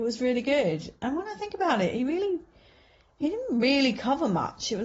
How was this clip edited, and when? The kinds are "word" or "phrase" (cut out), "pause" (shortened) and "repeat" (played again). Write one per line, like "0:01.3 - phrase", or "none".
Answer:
none